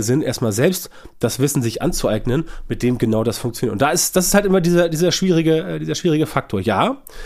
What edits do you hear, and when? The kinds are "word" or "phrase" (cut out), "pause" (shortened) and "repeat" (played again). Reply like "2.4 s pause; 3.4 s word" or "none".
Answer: none